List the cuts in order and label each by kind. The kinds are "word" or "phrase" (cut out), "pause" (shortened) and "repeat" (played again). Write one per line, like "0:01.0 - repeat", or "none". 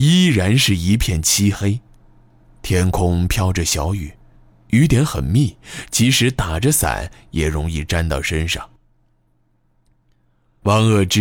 none